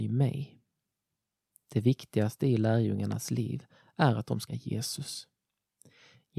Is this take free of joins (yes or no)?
no